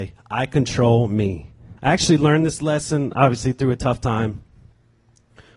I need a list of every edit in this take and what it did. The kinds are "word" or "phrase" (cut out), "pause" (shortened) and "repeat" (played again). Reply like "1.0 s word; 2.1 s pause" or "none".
1.8 s pause